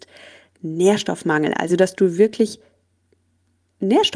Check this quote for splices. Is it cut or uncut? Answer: uncut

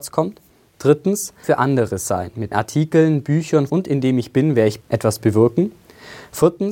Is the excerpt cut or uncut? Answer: cut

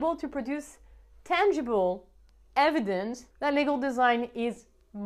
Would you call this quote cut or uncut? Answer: cut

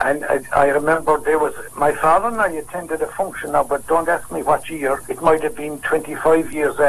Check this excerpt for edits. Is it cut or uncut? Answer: uncut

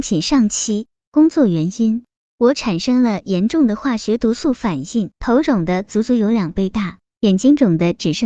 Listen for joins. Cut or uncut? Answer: cut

